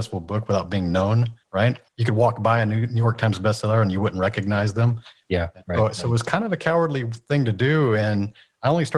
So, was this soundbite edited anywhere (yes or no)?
no